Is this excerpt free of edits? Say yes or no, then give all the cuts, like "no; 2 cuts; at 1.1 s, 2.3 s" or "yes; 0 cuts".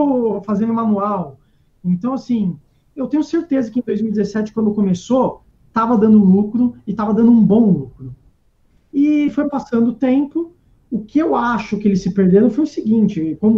yes; 0 cuts